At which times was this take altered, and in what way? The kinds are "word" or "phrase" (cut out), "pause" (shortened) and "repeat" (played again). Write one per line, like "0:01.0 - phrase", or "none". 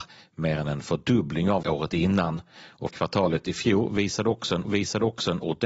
0:01.6 - word
0:02.9 - word
0:04.6 - repeat